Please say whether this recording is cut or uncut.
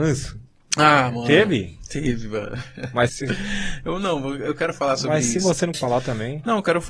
cut